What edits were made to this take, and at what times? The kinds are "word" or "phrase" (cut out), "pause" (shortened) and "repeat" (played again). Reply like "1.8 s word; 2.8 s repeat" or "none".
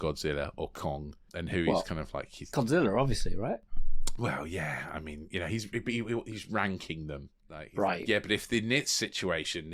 2.5 s word; 7.4 s pause